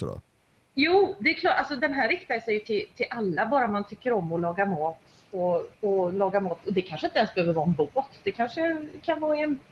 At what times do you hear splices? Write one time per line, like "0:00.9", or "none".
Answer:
0:05.7

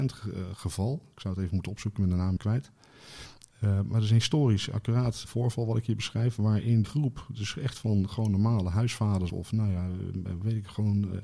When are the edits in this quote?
0:02.4
0:05.2
0:06.8
0:09.3

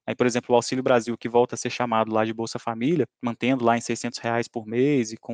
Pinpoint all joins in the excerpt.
0:03.1

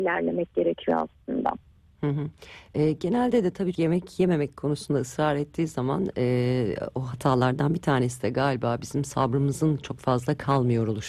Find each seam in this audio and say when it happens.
0:03.7

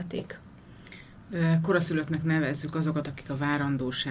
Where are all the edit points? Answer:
0:03.0

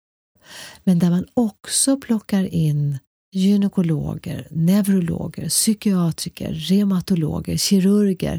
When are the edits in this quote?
0:03.1

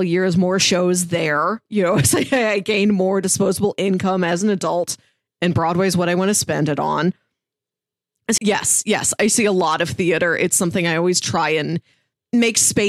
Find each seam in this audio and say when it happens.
0:08.4

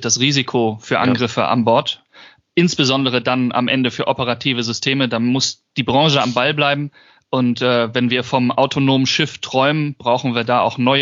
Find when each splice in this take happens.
none

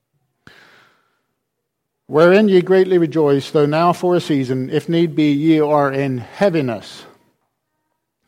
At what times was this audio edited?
none

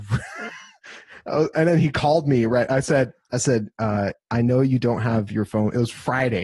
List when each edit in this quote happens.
none

